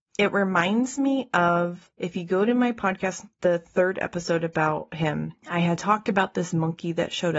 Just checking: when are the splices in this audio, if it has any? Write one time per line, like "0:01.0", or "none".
0:03.3